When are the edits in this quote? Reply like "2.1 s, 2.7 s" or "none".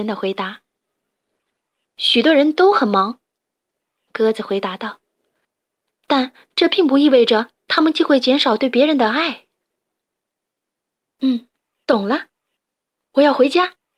none